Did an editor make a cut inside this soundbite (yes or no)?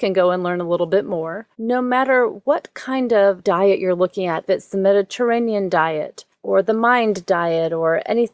yes